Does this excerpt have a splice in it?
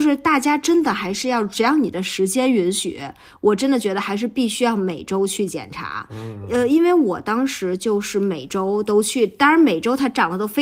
no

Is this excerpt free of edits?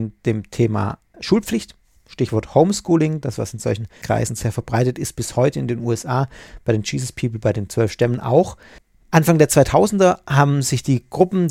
no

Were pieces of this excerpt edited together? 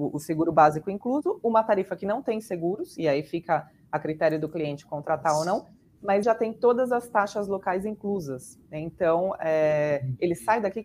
yes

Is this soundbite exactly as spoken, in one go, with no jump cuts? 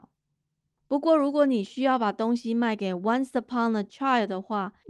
yes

